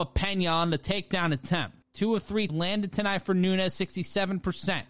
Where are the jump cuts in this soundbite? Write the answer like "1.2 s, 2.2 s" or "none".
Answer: 1.8 s, 2.5 s